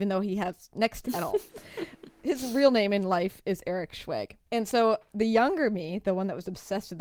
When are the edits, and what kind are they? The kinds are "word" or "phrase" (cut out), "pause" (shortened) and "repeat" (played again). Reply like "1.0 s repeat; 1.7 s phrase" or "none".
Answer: 1.0 s phrase; 4.4 s pause